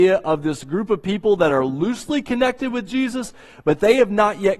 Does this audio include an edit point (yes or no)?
no